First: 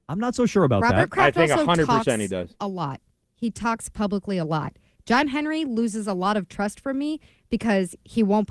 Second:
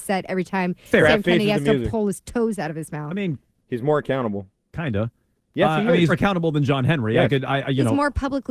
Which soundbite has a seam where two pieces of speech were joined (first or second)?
second